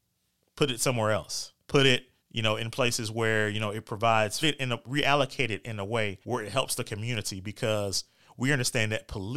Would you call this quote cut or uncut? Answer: cut